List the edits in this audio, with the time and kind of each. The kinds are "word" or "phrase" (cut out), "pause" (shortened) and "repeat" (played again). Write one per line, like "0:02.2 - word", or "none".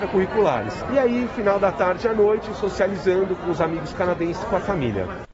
none